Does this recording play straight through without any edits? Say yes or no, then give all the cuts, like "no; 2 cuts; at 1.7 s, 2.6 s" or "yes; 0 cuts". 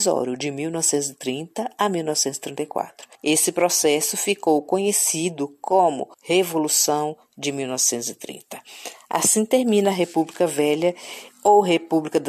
no; 2 cuts; at 3.1 s, 6.1 s